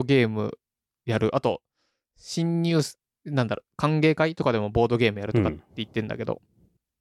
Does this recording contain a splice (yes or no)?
no